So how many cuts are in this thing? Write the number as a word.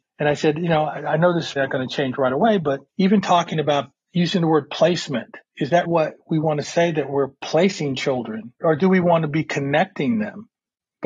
five